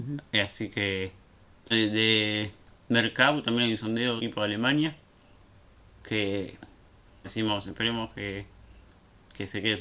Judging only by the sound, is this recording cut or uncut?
cut